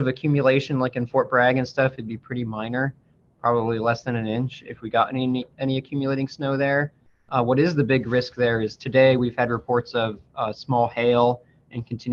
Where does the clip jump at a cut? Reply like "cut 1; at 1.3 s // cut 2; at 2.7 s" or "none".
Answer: none